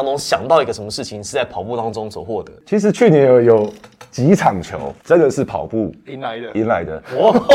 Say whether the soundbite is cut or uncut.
cut